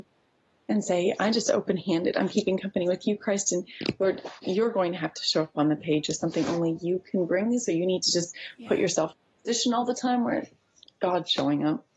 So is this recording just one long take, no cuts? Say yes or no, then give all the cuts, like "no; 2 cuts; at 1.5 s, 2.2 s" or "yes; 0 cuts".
yes; 0 cuts